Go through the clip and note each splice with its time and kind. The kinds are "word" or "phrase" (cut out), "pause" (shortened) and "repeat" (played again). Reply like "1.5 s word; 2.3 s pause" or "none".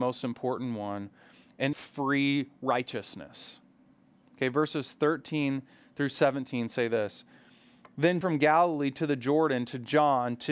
1.7 s phrase; 3.9 s pause; 8.2 s phrase